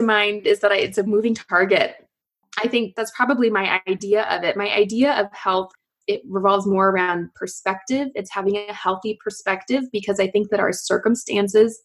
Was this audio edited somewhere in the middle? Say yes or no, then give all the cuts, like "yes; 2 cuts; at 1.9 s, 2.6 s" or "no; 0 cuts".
no; 0 cuts